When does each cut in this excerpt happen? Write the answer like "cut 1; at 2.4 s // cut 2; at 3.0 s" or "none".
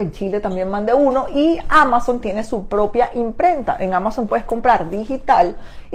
cut 1; at 4.3 s